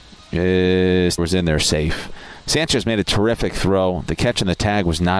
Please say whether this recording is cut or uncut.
cut